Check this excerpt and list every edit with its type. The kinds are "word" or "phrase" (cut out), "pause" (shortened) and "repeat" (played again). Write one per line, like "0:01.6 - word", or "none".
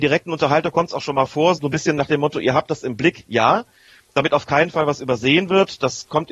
0:01.6 - word